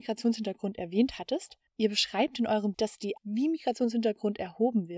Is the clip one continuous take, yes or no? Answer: no